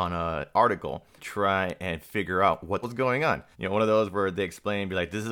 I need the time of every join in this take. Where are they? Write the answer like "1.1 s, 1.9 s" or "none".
1.2 s, 2.8 s, 3.5 s